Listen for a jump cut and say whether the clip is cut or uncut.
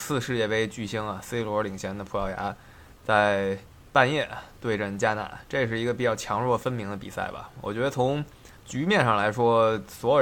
cut